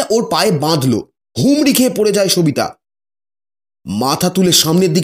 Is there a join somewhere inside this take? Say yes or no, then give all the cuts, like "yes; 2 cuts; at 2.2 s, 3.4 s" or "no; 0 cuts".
yes; 1 cut; at 1.2 s